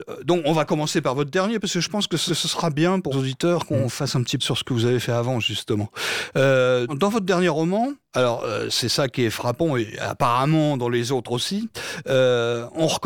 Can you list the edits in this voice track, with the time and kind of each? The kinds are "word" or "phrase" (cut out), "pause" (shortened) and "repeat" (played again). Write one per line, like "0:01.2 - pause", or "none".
0:02.3 - repeat
0:03.1 - word
0:04.4 - phrase
0:06.9 - word
0:08.0 - pause